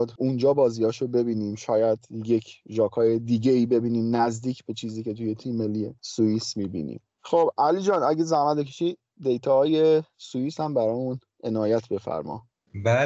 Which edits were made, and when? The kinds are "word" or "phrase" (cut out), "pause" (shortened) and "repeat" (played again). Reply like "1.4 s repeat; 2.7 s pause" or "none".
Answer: none